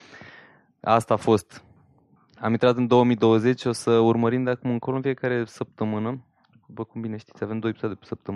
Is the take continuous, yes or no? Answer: yes